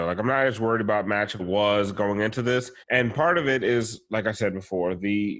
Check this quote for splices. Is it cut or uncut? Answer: cut